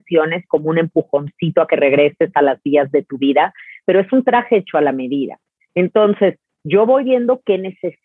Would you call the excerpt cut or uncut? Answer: uncut